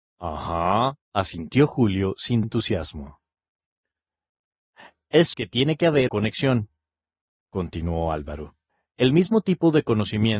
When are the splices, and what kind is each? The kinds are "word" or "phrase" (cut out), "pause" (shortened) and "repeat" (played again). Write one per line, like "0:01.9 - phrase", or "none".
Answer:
0:01.0 - pause
0:02.4 - word
0:05.3 - word
0:06.1 - word
0:08.7 - pause